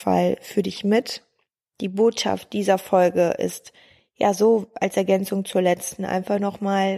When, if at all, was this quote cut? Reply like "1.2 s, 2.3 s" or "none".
none